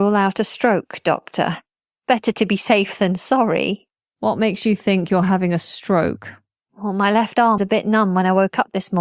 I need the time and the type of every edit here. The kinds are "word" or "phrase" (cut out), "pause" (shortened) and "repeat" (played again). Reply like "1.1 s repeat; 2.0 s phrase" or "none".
7.6 s word